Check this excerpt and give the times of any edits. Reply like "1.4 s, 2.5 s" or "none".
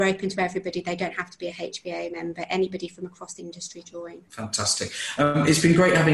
3.4 s, 3.8 s, 4.3 s